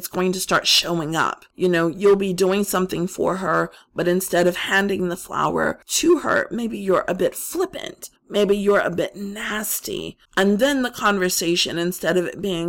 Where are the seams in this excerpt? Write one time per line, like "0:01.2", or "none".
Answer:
0:01.5
0:05.8
0:08.2
0:10.3